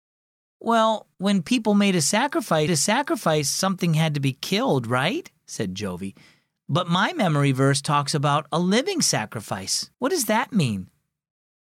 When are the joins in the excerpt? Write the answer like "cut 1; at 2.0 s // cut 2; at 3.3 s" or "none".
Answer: cut 1; at 1.1 s // cut 2; at 2.7 s // cut 3; at 9.9 s